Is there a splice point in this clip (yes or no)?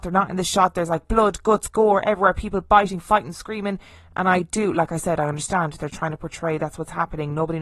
no